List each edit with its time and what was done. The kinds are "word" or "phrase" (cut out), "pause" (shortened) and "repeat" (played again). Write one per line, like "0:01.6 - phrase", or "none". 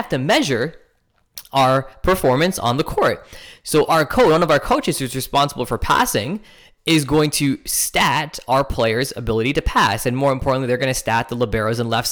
none

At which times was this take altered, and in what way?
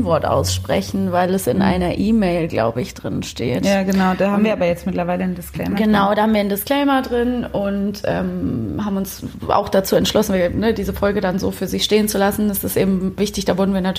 none

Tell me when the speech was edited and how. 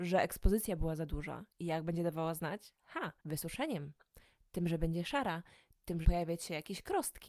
0:03.2 - pause
0:06.0 - phrase

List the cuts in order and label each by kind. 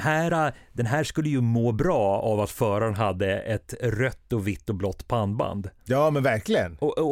0:05.8 - pause

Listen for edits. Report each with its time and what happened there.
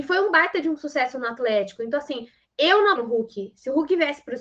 0:03.0 - word

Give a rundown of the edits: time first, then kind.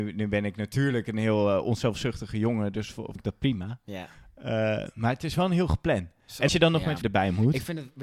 0:03.2 - word
0:06.5 - word
0:07.0 - word

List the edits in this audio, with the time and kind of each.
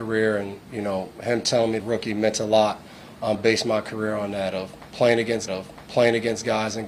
0:01.8 - phrase
0:03.3 - phrase
0:05.5 - repeat

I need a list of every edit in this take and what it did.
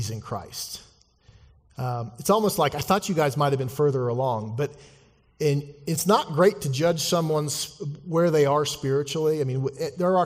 none

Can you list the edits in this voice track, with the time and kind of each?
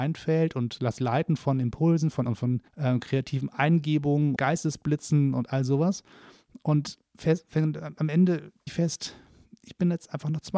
0:01.0 - word
0:02.3 - word
0:02.7 - pause
0:04.4 - word
0:08.7 - word

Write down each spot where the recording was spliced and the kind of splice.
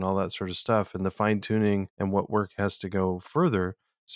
0:01.9 - pause

